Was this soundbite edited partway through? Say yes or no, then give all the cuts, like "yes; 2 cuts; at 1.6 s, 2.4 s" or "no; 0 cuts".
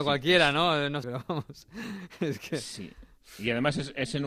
yes; 1 cut; at 1.0 s